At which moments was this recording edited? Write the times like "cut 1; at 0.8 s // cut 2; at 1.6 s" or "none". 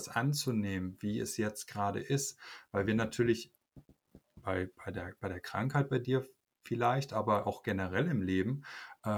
none